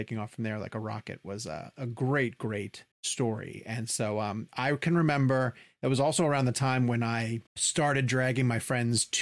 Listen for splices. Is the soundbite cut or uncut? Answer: cut